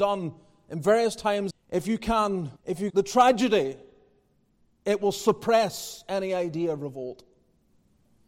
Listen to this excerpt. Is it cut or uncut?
cut